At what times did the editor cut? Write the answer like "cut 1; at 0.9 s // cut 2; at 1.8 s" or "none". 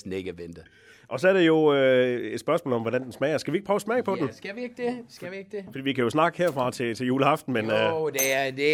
none